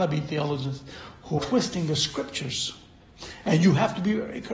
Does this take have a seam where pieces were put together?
yes; 1 cut; at 1.4 s

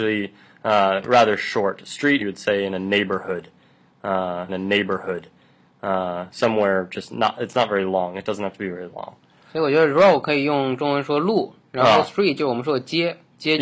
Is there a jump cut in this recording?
yes; 2 cuts; at 2.2 s, 4.5 s

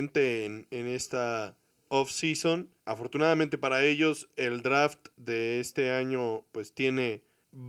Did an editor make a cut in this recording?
yes; 1 cut; at 2.8 s

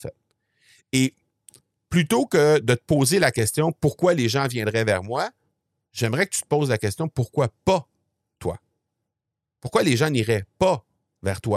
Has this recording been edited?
no; 0 cuts

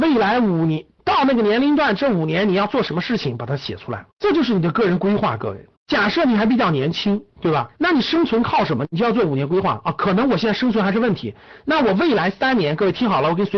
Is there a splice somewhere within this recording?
yes; 5 cuts; at 1.0 s, 4.1 s, 5.8 s, 7.3 s, 7.8 s

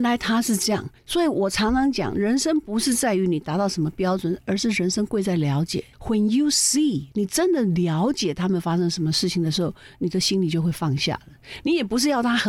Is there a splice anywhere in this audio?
yes; 2 cuts; at 1.0 s, 5.9 s

